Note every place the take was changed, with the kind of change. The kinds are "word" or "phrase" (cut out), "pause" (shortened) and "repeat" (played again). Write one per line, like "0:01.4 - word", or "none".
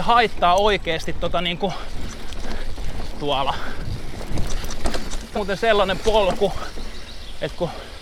0:03.2 - word
0:05.4 - word